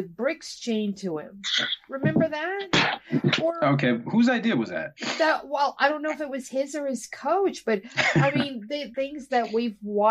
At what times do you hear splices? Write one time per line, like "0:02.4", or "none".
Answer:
0:08.9